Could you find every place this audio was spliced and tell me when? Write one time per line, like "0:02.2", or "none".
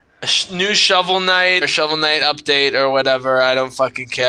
0:01.6